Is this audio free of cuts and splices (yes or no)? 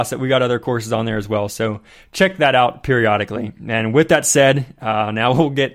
yes